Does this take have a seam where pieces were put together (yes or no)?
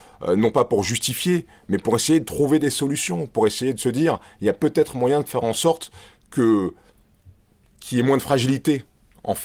no